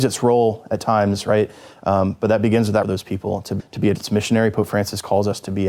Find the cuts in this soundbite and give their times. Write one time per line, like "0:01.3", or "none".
0:02.8
0:03.6
0:03.9